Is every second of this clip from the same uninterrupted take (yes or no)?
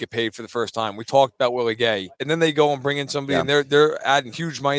no